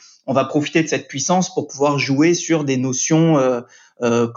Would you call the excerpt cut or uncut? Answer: uncut